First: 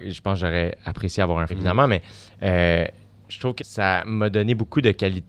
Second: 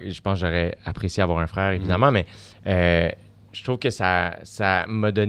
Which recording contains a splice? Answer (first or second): first